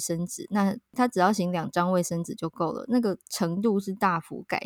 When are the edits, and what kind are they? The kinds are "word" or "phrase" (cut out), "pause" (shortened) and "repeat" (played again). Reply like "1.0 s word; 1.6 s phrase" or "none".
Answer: 3.2 s pause